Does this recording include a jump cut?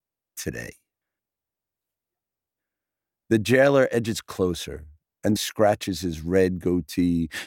yes; 1 cut; at 5.4 s

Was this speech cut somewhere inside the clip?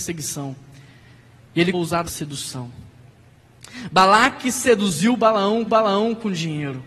yes; 3 cuts; at 1.7 s, 2.1 s, 5.7 s

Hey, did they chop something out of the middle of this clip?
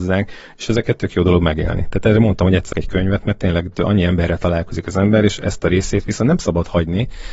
yes; 1 cut; at 2.7 s

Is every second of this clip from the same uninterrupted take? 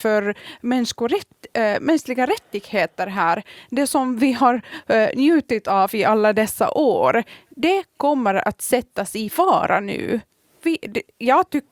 yes; 0 cuts

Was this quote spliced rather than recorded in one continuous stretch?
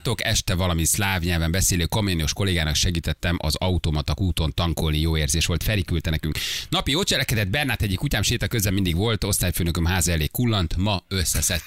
no; 0 cuts

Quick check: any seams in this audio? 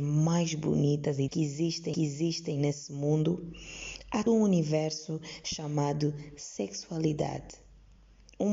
yes; 3 cuts; at 1.3 s, 1.9 s, 4.3 s

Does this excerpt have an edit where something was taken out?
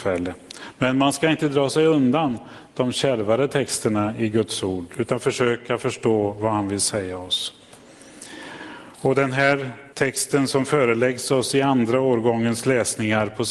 yes; 2 cuts; at 8.9 s, 9.9 s

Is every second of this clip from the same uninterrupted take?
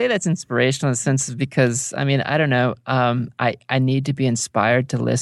yes; 0 cuts

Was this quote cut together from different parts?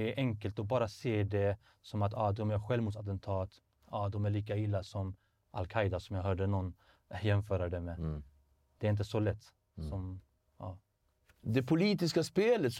no; 0 cuts

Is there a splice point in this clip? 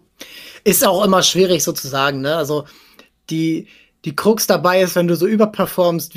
no; 0 cuts

